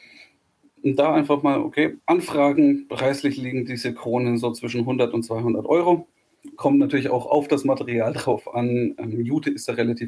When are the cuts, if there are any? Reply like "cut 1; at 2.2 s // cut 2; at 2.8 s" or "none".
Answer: cut 1; at 2.0 s